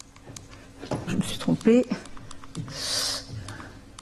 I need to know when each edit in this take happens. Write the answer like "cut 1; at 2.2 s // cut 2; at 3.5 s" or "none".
cut 1; at 1.1 s